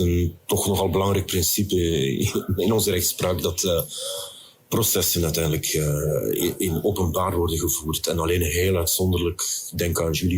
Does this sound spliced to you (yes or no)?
no